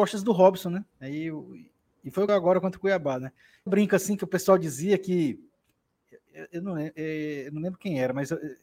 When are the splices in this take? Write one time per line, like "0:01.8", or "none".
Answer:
0:00.9
0:02.3
0:03.7

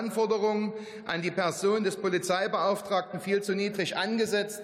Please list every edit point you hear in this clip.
none

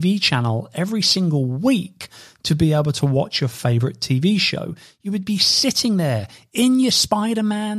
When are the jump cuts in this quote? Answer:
none

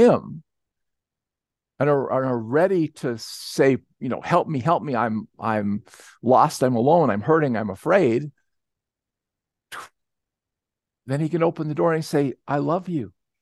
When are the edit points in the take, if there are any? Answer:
0:05.3

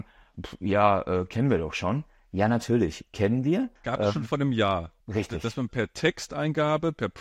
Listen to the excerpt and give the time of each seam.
0:03.8
0:05.0

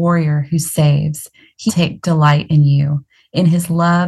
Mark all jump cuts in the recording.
0:01.7
0:02.0

